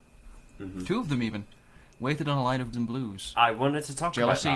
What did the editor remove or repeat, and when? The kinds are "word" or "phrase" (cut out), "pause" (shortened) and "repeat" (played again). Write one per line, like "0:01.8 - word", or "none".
0:02.7 - word

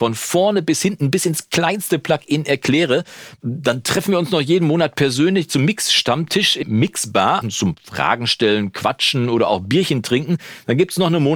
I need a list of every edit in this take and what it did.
0:06.6 - word
0:07.4 - word

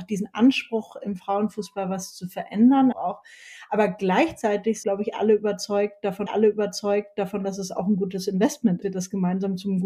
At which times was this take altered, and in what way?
0:02.9 - phrase
0:04.8 - word
0:06.3 - repeat
0:08.8 - phrase

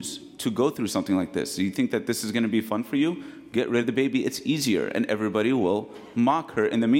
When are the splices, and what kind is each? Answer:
none

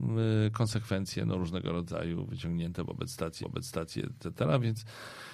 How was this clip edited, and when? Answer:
0:03.4 - repeat

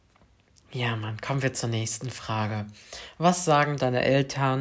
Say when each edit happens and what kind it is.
none

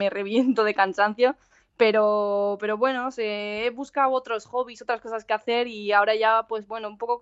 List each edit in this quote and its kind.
0:01.6 - pause

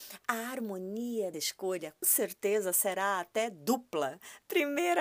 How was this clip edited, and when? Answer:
0:01.3 - word
0:02.0 - word

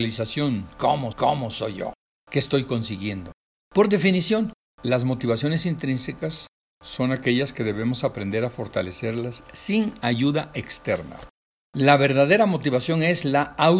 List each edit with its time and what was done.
0:01.1 - repeat

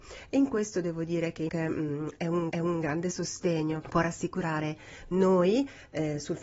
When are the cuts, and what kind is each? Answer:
0:01.5 - word
0:02.5 - repeat
0:03.8 - word

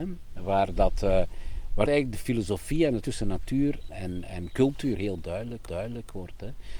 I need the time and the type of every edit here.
0:01.9 - word
0:03.0 - word
0:03.9 - word
0:05.7 - repeat

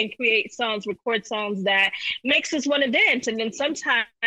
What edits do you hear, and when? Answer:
none

